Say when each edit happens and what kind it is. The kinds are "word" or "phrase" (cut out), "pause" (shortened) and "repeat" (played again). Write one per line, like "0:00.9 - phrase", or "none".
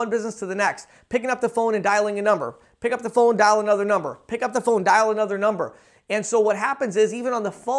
none